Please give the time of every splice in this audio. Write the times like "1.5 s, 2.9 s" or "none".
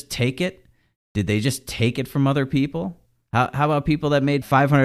none